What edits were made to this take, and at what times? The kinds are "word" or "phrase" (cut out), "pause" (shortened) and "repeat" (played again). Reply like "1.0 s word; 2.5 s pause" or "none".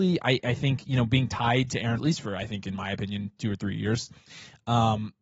2.0 s word